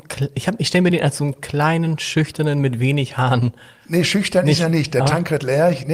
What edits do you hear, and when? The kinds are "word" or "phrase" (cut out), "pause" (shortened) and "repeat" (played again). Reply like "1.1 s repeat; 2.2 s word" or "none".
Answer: none